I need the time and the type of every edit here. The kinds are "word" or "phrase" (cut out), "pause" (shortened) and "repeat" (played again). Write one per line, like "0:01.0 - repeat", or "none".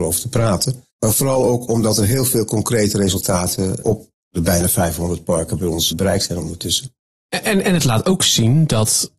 0:00.9 - pause
0:03.8 - word
0:05.9 - word